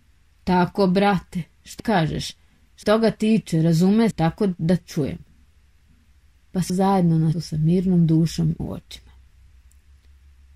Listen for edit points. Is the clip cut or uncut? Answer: cut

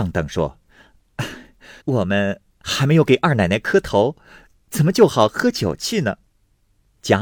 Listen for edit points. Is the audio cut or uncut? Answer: cut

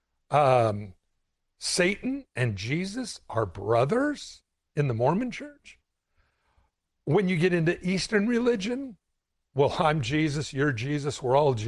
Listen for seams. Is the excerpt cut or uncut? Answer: uncut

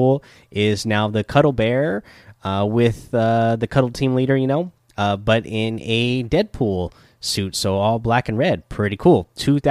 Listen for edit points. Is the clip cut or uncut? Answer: uncut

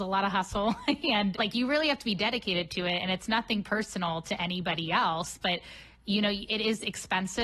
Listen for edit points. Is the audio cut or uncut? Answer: cut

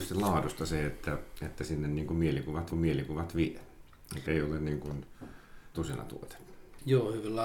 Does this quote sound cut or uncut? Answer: cut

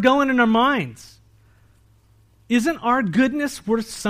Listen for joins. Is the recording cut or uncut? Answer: uncut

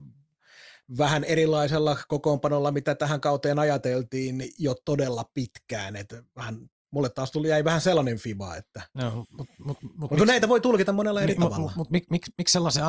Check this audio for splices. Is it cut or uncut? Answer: uncut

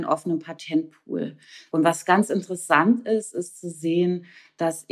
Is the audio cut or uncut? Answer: uncut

